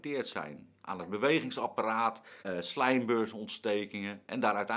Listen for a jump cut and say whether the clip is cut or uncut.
cut